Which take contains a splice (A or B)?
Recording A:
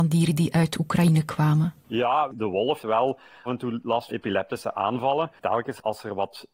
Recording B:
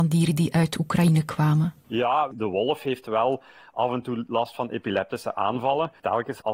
A